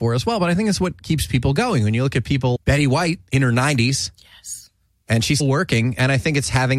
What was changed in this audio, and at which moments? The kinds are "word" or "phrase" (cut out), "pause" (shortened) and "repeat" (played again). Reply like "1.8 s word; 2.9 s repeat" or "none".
2.6 s word; 5.4 s word